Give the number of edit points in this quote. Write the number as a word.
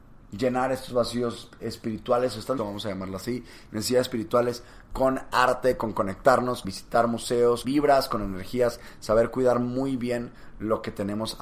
three